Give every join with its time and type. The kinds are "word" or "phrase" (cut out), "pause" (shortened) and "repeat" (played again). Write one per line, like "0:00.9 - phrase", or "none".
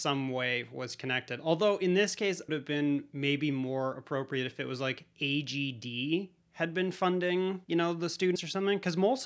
0:02.5 - phrase
0:07.6 - pause
0:08.4 - word